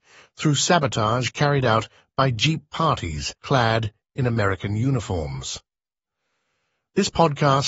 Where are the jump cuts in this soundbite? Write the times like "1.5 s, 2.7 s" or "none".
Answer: 3.4 s